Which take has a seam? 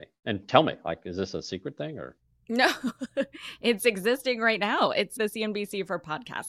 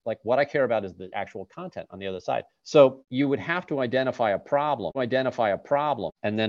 second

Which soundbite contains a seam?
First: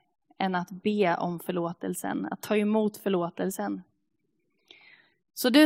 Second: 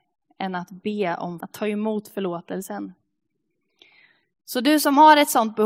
second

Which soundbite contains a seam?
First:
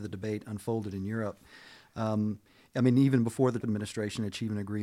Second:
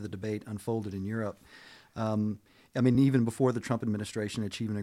first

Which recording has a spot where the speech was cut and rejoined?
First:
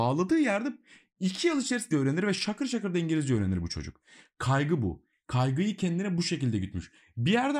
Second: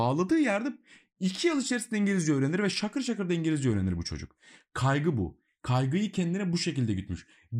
first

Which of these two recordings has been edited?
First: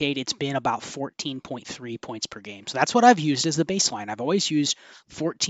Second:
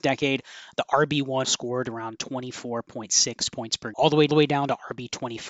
second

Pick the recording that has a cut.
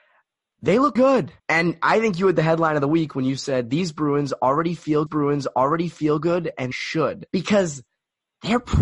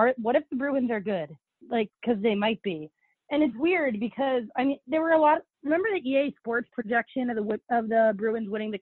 first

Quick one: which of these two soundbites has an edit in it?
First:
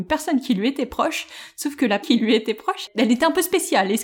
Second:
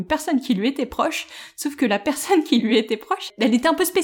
first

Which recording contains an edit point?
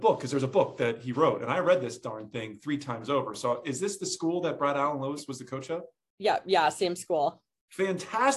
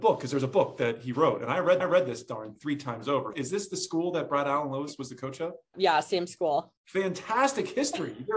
second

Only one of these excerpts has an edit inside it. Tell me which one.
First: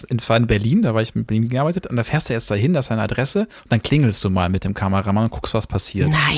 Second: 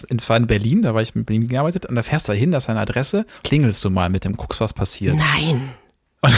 second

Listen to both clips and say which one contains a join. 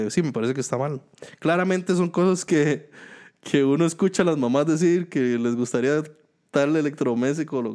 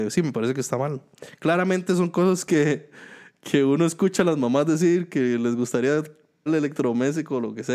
second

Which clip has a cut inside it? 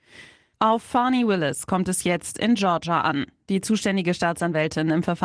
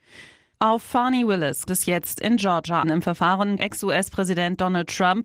second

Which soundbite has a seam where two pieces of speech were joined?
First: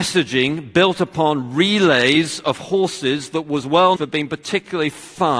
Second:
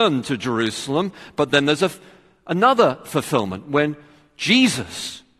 first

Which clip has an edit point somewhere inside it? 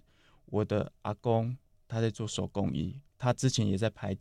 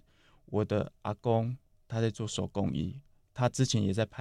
first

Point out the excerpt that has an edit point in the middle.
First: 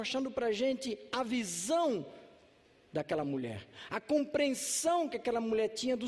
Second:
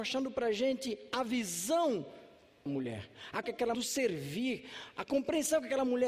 second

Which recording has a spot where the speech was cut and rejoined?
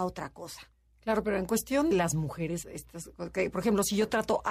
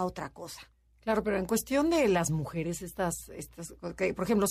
first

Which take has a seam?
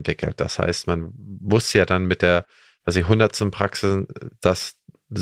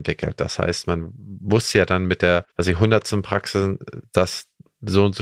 second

